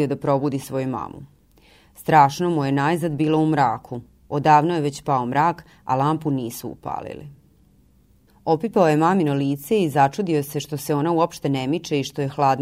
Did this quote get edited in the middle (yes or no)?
no